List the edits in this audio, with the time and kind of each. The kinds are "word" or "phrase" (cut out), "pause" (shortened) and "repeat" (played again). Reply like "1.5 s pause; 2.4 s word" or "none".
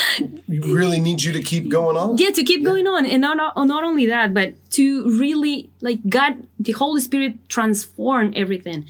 6.5 s pause